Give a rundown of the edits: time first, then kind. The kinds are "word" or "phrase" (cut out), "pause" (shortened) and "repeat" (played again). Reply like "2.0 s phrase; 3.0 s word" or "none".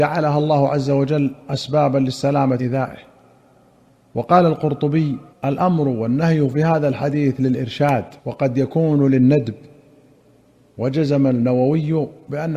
2.6 s word; 5.3 s pause; 8.2 s pause